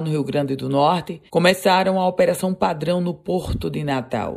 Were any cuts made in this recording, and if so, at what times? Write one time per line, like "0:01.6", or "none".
0:01.3

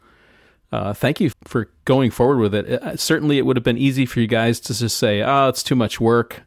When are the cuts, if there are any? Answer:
0:01.3

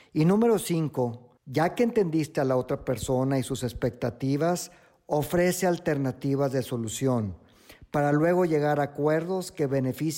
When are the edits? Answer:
0:01.4

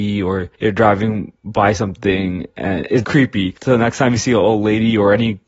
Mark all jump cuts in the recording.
0:03.0

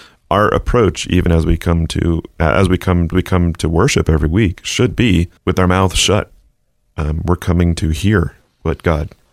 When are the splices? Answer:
0:03.1
0:05.4

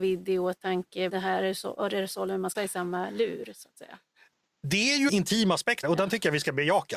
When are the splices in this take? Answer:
0:01.1
0:02.5
0:05.1
0:05.8

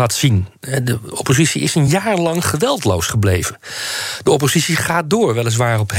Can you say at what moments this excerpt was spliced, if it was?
none

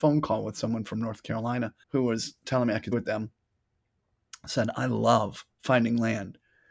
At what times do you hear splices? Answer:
0:01.8
0:02.9

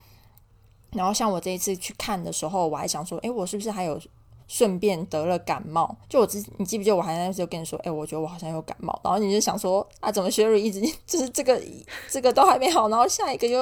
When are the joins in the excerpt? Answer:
0:04.4
0:06.0

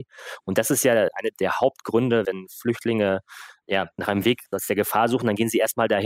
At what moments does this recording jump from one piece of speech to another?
none

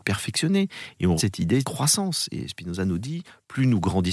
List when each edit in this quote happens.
0:01.2
0:01.6

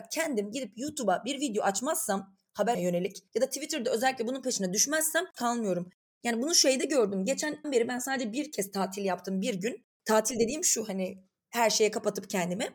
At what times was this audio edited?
0:02.7
0:03.3
0:05.3
0:07.6
0:09.9

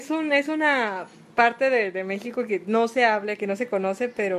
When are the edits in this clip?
none

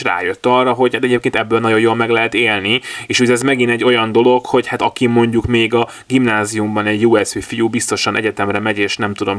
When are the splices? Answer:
none

